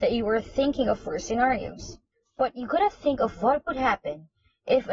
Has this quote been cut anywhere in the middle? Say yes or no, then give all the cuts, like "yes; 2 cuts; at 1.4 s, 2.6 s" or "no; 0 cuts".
no; 0 cuts